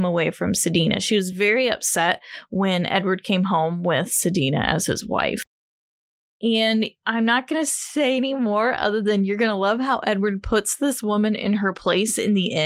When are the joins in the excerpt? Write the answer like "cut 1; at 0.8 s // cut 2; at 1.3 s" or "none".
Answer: none